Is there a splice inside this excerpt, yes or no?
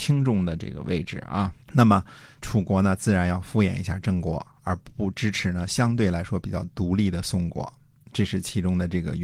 yes